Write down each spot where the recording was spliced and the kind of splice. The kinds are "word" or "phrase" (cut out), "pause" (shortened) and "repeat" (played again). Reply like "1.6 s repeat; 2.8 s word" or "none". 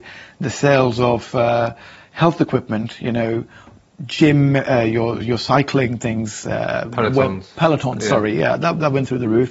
none

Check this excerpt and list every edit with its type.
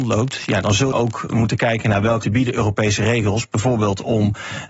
0.9 s word; 2.2 s word

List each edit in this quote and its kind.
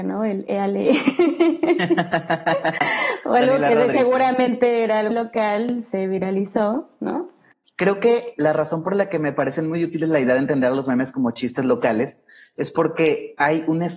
5.1 s word

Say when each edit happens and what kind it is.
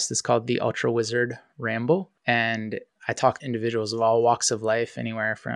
2.2 s pause; 3.4 s word

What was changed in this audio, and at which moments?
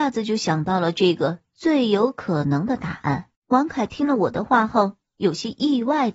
3.3 s pause

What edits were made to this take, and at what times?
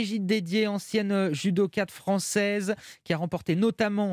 none

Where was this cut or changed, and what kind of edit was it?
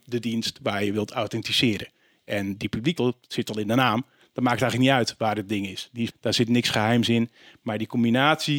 3.0 s word; 6.1 s word

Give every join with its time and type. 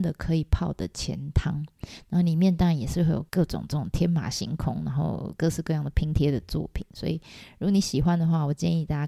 3.3 s pause

